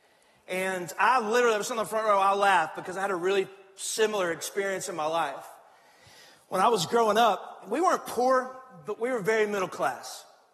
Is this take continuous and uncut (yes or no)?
yes